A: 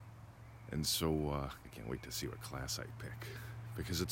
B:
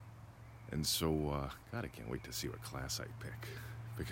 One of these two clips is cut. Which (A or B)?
A